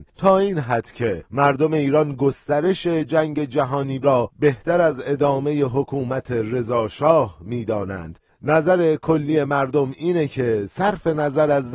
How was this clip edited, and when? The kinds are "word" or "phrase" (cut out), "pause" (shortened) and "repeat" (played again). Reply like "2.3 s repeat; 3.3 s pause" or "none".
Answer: 4.0 s word